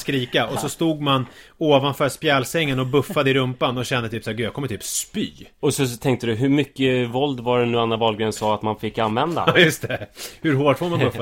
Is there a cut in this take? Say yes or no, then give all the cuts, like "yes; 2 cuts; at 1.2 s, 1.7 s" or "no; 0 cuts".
no; 0 cuts